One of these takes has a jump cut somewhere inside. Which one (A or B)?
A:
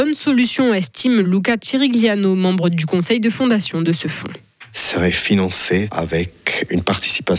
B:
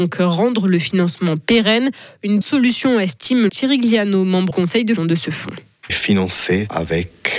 B